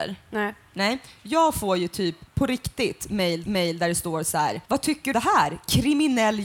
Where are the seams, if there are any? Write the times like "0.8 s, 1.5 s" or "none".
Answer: 2.3 s, 3.4 s, 4.6 s, 5.1 s